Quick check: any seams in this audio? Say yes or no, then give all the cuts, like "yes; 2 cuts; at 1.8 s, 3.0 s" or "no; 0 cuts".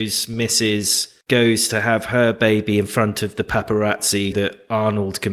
yes; 2 cuts; at 1.2 s, 4.3 s